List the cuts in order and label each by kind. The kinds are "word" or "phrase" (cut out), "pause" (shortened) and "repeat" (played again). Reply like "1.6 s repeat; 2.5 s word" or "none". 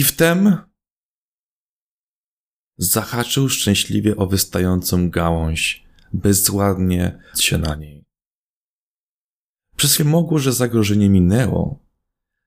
7.3 s word; 10.0 s phrase

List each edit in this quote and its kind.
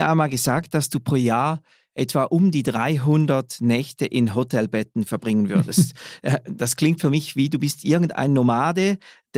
none

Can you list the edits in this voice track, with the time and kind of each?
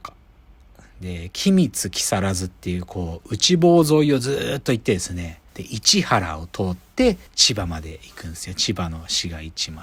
5.5 s pause; 7.3 s pause

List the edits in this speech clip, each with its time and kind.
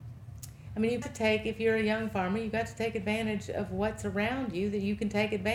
1.0 s word

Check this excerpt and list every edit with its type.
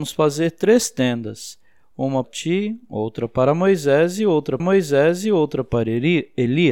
2.2 s word; 4.6 s repeat

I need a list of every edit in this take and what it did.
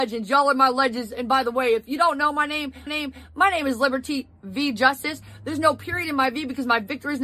2.9 s repeat

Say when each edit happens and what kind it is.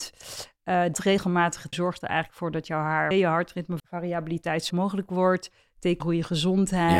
0.9 s word; 1.7 s word; 3.1 s word; 3.8 s word; 4.7 s word; 6.0 s word

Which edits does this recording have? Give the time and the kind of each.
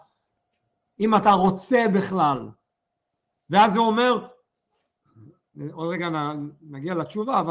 none

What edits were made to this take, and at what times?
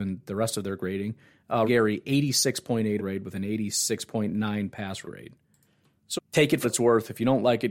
1.6 s word; 3.0 s word; 5.0 s word; 6.2 s word; 6.6 s word

